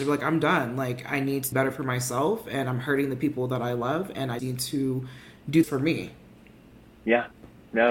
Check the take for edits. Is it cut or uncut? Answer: cut